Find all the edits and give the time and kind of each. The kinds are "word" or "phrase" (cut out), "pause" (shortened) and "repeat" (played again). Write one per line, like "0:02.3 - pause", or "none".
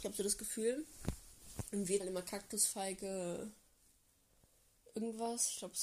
0:02.0 - word